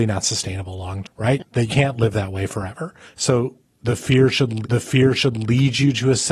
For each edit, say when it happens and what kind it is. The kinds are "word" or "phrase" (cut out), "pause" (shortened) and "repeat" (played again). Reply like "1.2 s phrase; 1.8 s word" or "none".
1.0 s word; 1.7 s word; 3.1 s pause; 4.6 s repeat